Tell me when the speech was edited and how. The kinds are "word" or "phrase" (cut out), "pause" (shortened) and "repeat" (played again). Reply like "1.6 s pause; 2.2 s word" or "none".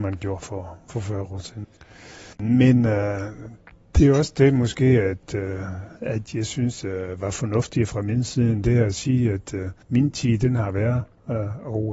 2.3 s pause; 3.7 s pause; 9.8 s pause